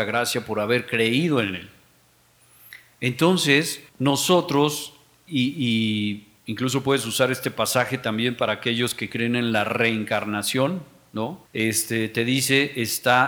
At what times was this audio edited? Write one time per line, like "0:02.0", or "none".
0:03.9
0:06.4
0:11.5

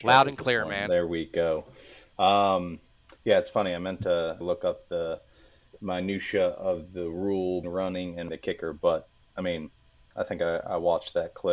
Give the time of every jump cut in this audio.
0:04.4
0:07.6
0:08.3

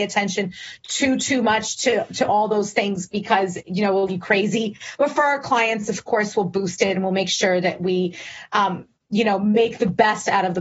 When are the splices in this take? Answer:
0:04.1

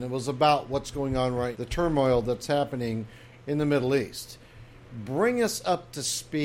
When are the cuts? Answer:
0:01.5

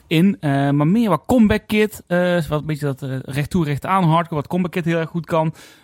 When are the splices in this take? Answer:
none

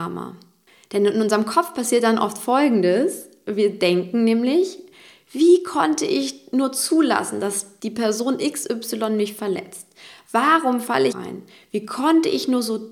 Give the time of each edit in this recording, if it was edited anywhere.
0:11.1

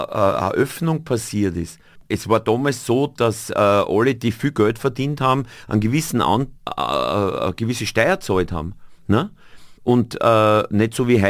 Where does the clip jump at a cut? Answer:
0:06.6
0:09.8

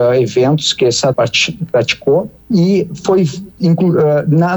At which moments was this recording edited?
0:01.1
0:02.4
0:03.6

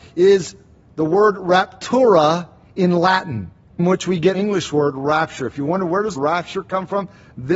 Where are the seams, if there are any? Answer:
0:03.8
0:04.3
0:06.2

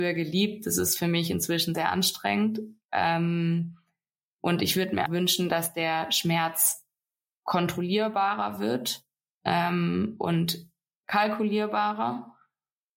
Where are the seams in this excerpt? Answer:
0:01.7
0:05.1

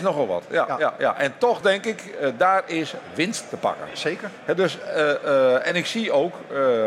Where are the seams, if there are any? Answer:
none

